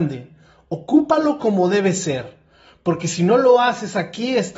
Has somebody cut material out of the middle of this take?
no; 0 cuts

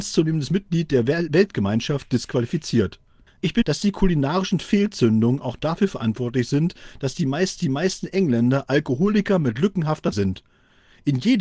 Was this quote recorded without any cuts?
no; 4 cuts; at 3.3 s, 3.6 s, 7.6 s, 10.1 s

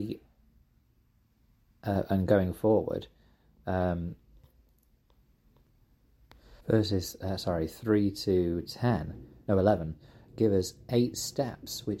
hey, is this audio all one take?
no; 1 cut; at 6.6 s

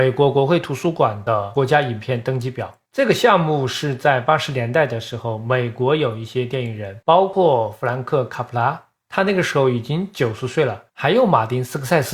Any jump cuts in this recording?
yes; 2 cuts; at 7.0 s, 10.9 s

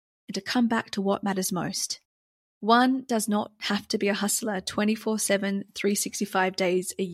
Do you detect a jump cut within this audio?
no; 0 cuts

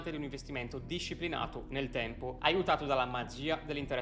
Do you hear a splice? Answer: no; 0 cuts

